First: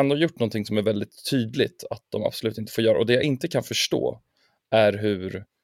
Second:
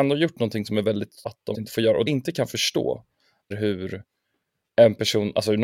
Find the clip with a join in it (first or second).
second